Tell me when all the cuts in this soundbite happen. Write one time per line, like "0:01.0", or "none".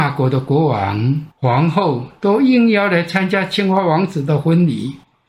0:01.3